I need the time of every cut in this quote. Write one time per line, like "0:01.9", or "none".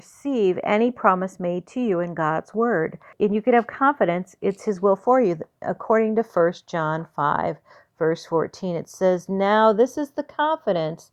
none

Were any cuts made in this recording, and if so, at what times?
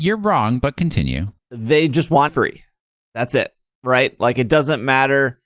0:01.4
0:02.3

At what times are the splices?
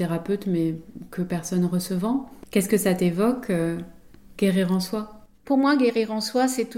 0:05.3

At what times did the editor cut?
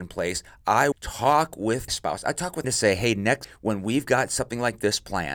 0:00.9
0:01.9
0:02.6
0:03.4

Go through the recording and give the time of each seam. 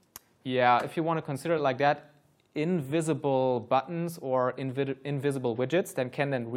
none

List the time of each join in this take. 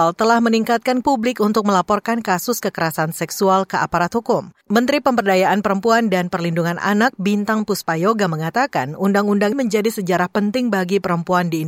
0:01.0
0:04.6
0:09.5

